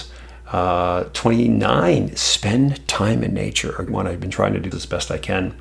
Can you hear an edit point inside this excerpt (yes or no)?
yes